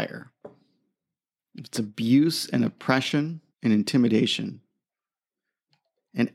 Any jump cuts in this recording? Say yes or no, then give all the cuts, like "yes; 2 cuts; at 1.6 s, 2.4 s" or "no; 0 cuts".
yes; 1 cut; at 3.5 s